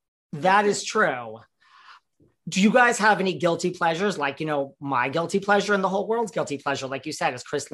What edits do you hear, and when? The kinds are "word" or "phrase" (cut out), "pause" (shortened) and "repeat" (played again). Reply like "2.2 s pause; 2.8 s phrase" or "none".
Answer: none